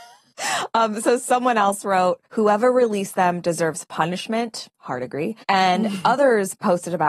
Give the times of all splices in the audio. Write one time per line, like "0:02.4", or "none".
0:02.3
0:04.7
0:05.4